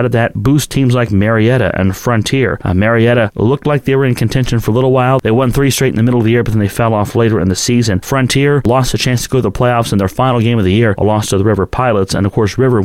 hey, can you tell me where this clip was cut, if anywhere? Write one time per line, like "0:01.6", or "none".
none